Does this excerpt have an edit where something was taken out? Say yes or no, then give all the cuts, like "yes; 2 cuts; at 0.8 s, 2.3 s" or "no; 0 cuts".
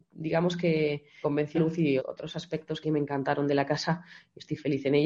yes; 4 cuts; at 1.2 s, 1.5 s, 2.0 s, 2.8 s